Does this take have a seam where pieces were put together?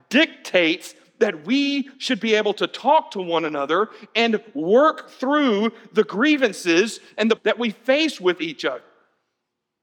yes; 1 cut; at 7.4 s

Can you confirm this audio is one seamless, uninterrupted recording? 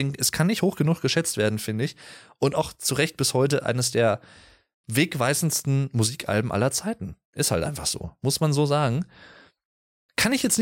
yes; 0 cuts

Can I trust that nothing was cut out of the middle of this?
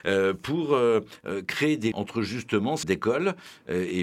no; 2 cuts; at 1.9 s, 2.8 s

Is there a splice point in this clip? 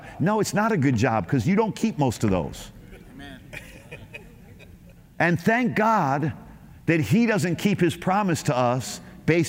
no; 0 cuts

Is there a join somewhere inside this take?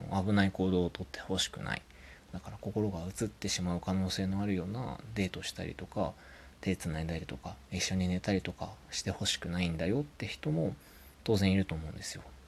yes; 2 cuts; at 10.1 s, 11.1 s

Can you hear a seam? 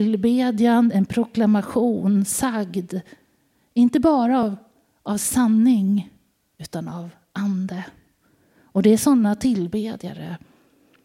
no; 0 cuts

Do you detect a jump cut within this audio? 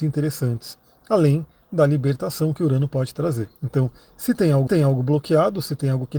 yes; 2 cuts; at 3.6 s, 4.7 s

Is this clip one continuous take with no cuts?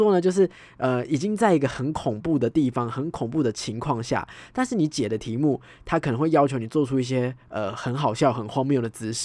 yes; 0 cuts

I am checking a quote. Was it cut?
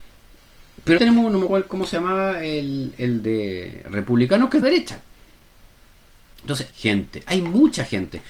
yes; 4 cuts; at 1.0 s, 1.5 s, 4.6 s, 6.7 s

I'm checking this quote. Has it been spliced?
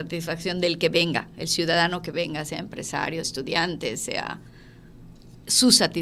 yes; 1 cut; at 3.2 s

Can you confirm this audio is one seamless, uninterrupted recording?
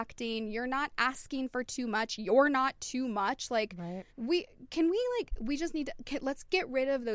no; 1 cut; at 4.1 s

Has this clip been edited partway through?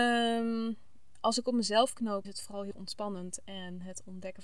yes; 2 cuts; at 2.2 s, 2.7 s

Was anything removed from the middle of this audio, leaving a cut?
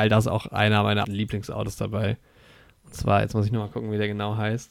yes; 1 cut; at 1.0 s

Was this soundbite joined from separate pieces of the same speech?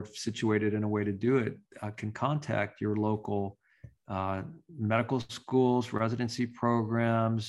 no; 0 cuts

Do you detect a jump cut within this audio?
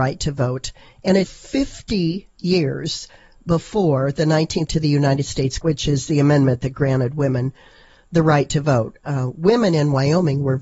yes; 3 cuts; at 1.2 s, 4.7 s, 5.6 s

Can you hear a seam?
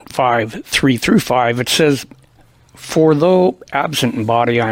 no; 0 cuts

